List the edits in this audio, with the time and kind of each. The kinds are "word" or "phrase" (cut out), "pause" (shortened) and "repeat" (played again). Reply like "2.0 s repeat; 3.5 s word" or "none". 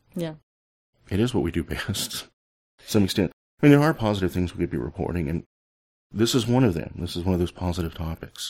none